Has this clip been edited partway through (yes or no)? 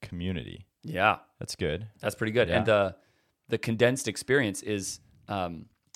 no